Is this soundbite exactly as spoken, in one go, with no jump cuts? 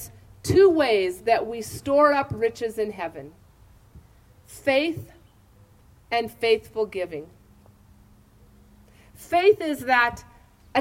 yes; 0 cuts

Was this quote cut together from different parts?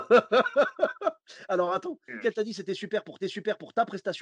yes; 2 cuts; at 2.2 s, 3.2 s

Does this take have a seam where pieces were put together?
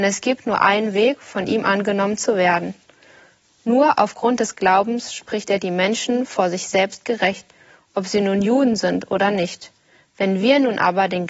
no; 0 cuts

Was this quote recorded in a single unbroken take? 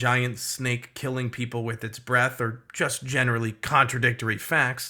yes; 0 cuts

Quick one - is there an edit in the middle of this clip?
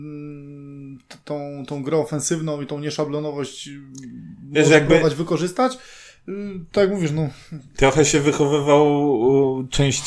no; 0 cuts

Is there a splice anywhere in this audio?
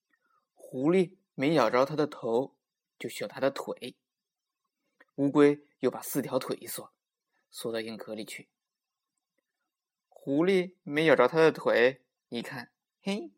no; 0 cuts

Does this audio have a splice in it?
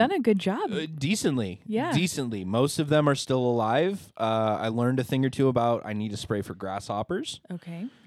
no; 0 cuts

